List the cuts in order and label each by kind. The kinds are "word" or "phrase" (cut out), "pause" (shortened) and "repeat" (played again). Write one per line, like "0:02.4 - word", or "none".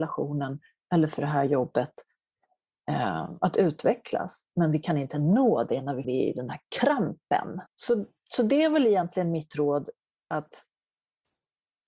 0:06.0 - word
0:07.7 - pause